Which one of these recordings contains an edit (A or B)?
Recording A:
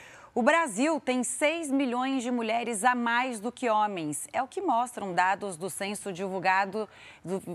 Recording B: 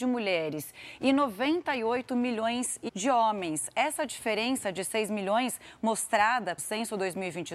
B